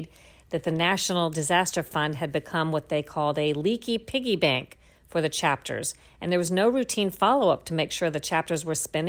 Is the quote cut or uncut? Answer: uncut